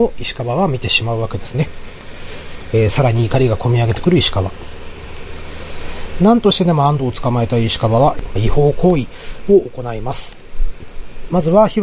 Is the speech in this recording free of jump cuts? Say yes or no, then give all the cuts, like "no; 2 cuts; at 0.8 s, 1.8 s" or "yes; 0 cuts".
no; 1 cut; at 8.4 s